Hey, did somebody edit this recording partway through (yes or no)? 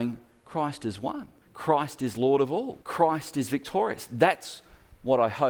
yes